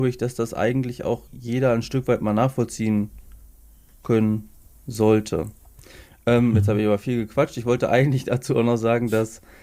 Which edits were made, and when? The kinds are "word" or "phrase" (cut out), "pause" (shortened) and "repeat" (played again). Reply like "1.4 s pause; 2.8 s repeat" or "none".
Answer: 1.3 s pause